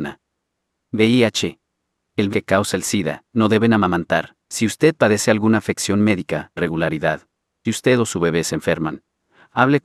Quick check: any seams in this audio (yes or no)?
yes